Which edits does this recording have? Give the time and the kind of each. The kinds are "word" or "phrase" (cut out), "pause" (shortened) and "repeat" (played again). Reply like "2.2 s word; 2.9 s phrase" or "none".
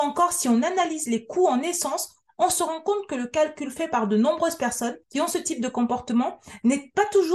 5.0 s pause